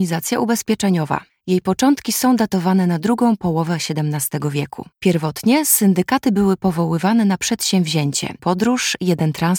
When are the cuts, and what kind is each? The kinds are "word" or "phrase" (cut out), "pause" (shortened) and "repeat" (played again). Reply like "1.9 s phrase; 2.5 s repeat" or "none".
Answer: 1.3 s pause; 4.9 s pause; 8.4 s word